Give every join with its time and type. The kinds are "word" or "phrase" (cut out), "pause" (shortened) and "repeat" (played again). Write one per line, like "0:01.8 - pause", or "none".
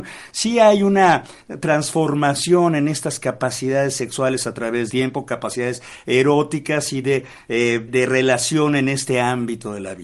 0:04.9 - word
0:07.9 - word

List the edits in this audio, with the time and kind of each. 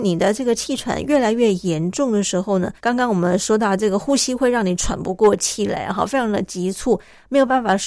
0:02.8 - pause

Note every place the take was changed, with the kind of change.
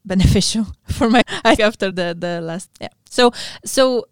0:01.2 - word
0:01.6 - word
0:01.9 - word
0:02.7 - word

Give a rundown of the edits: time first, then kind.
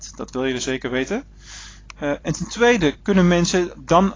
none

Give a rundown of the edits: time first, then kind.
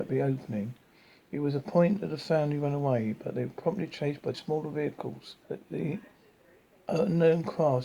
0:04.3 - word
0:05.4 - pause

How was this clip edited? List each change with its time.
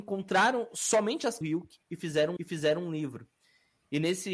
0:01.4 - phrase
0:01.8 - pause
0:02.4 - repeat

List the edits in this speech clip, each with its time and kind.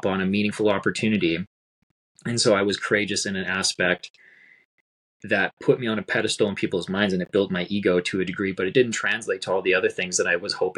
none

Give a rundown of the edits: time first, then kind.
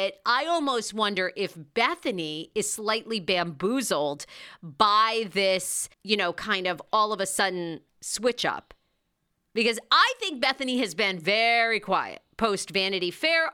0:05.9 - pause
0:07.9 - pause

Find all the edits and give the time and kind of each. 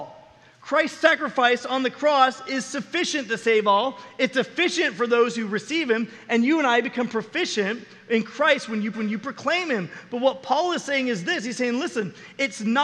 0:08.9 - repeat

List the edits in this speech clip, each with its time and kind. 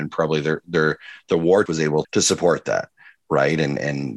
0:01.7 - word
0:02.0 - word

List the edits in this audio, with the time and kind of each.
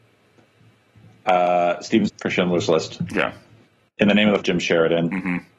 0:02.1 - word
0:04.4 - word

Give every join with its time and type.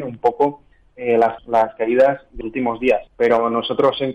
0:01.4 - word
0:02.4 - word
0:03.1 - pause

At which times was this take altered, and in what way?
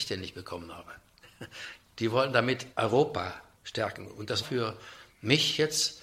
0:04.4 - word

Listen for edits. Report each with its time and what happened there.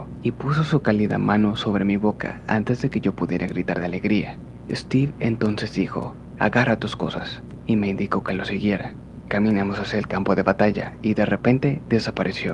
none

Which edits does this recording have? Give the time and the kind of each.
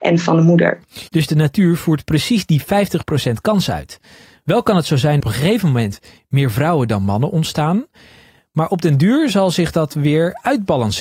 0:01.1 - pause
0:05.2 - phrase

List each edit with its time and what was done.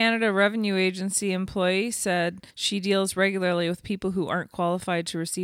0:02.5 - pause

